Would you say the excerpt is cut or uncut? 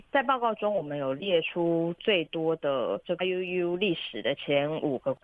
cut